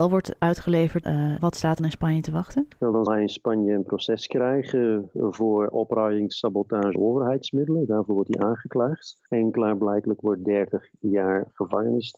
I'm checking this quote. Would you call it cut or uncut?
cut